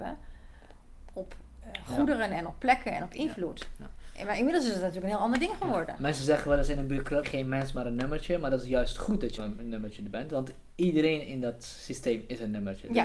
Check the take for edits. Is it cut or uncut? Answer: cut